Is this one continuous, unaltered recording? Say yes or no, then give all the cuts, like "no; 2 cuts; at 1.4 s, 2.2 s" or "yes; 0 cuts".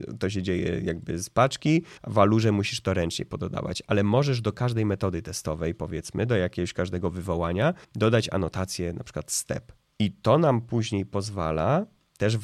no; 3 cuts; at 2.0 s, 7.8 s, 9.8 s